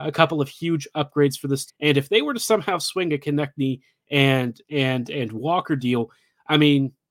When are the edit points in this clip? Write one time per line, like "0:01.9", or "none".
0:01.7
0:04.6